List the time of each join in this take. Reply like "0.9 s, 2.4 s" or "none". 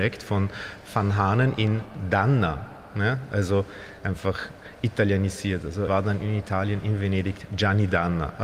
5.9 s